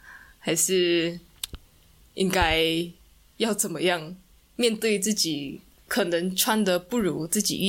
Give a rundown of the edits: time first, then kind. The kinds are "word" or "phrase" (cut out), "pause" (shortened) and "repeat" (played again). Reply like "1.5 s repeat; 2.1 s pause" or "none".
none